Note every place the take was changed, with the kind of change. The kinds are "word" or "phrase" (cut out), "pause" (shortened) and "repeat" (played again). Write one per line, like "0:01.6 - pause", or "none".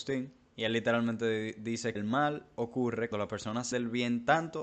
0:02.0 - word
0:03.1 - word
0:03.7 - word